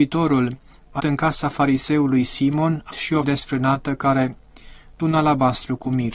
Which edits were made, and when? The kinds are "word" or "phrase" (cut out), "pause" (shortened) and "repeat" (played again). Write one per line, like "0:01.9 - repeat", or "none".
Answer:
0:01.0 - word
0:02.9 - word
0:03.2 - word
0:05.0 - word